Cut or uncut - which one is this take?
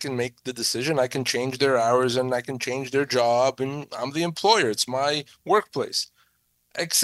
uncut